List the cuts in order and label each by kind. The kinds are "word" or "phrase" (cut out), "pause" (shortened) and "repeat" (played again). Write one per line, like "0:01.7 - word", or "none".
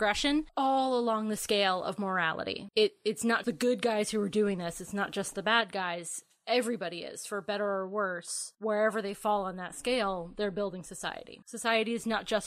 0:03.4 - word